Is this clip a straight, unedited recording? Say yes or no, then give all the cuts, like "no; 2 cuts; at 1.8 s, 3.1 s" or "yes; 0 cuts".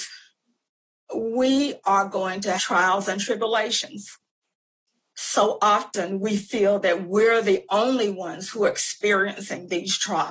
no; 2 cuts; at 2.6 s, 4.8 s